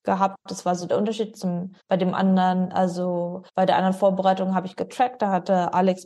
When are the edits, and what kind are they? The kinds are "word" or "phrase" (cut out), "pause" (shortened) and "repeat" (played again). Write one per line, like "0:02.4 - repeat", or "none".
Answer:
0:01.8 - pause
0:03.5 - pause